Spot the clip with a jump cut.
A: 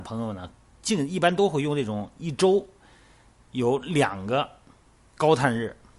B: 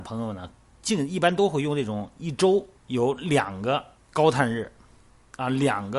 B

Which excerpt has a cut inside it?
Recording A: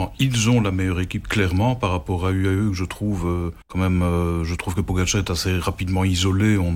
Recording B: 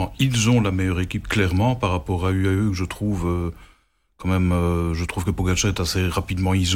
A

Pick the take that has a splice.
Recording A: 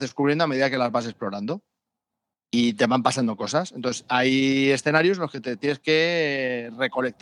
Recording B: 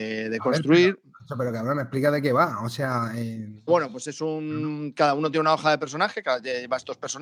B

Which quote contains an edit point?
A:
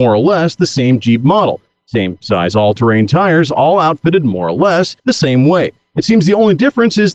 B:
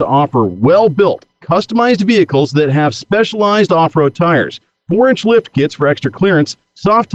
A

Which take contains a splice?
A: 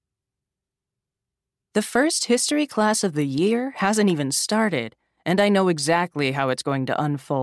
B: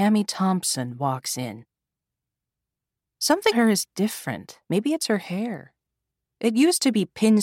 B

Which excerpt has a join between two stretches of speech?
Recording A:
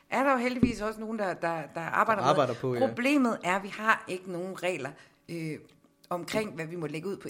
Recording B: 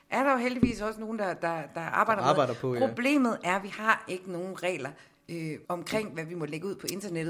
B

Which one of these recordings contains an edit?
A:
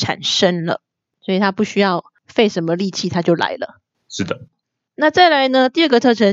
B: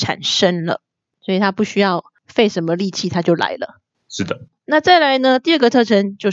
B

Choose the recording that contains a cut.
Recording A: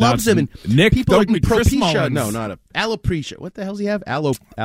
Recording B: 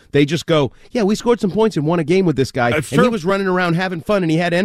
A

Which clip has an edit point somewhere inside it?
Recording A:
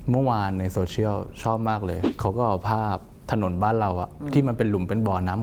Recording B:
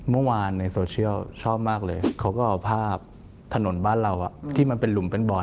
A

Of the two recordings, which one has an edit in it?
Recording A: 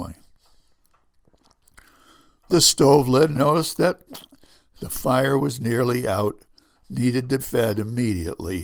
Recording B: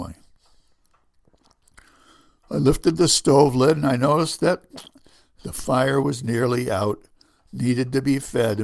A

